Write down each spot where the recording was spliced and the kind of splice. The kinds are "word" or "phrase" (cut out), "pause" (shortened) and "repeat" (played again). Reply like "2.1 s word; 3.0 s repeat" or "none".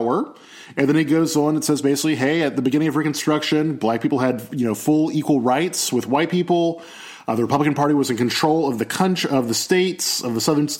none